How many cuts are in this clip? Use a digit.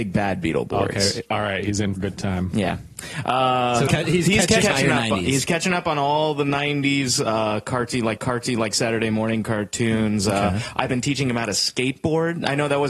4